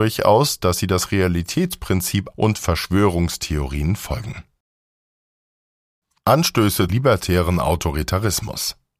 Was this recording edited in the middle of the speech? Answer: yes; 2 cuts; at 2.3 s, 6.9 s

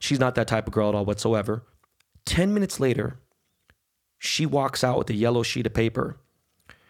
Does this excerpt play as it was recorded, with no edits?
yes; 0 cuts

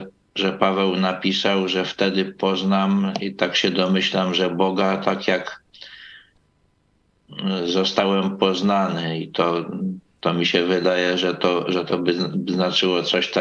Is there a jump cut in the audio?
no; 0 cuts

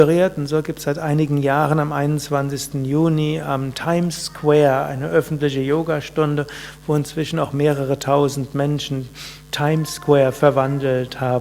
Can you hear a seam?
no; 0 cuts

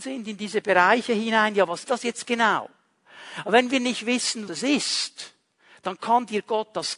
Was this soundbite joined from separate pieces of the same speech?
yes; 3 cuts; at 1.8 s, 2.2 s, 4.5 s

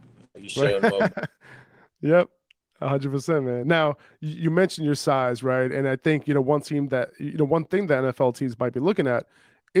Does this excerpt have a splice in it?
no; 0 cuts

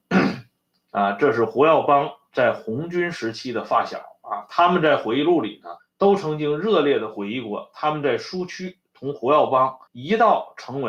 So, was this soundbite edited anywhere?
yes; 2 cuts; at 5.8 s, 9.9 s

